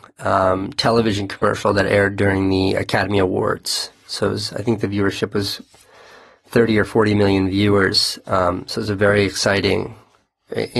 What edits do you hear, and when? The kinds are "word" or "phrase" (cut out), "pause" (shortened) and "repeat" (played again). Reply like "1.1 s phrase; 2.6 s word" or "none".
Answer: none